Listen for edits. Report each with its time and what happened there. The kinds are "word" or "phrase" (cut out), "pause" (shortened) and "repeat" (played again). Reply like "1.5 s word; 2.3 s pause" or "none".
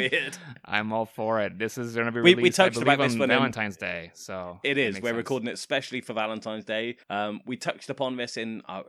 7.0 s pause